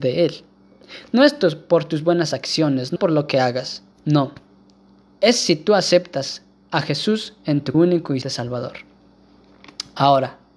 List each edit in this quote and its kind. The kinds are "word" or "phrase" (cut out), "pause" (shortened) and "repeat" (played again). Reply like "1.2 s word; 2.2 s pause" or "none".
3.0 s word; 3.9 s pause; 7.7 s phrase; 8.2 s word